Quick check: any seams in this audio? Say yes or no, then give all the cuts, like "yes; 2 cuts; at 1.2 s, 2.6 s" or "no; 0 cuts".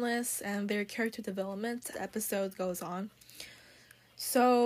yes; 1 cut; at 1.9 s